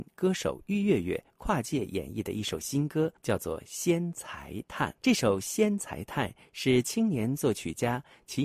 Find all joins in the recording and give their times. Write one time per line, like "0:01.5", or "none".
0:03.2
0:05.0